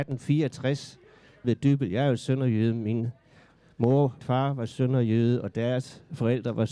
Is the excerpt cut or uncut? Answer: cut